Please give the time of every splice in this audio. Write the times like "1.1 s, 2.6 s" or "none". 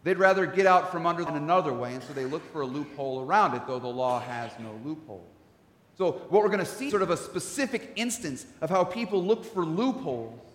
1.3 s, 6.9 s